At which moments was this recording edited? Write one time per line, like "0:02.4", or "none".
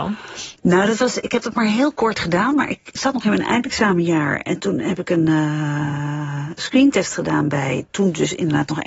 none